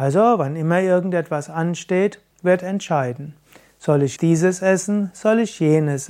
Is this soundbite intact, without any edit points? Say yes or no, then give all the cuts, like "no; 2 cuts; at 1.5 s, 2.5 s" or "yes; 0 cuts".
no; 2 cuts; at 2.3 s, 4.2 s